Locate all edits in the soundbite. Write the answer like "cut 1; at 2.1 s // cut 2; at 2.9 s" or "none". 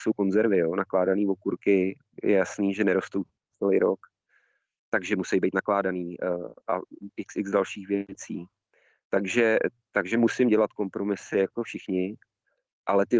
none